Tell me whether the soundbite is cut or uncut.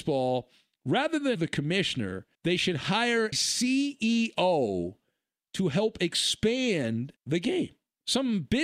cut